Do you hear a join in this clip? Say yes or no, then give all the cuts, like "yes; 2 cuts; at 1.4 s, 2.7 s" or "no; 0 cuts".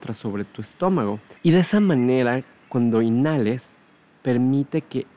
yes; 1 cut; at 1.4 s